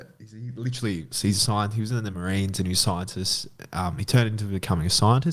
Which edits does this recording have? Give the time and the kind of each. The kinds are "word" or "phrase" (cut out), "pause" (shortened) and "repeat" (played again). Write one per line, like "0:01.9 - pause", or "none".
none